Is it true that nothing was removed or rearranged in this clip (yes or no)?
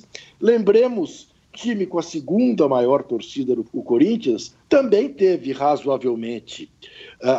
no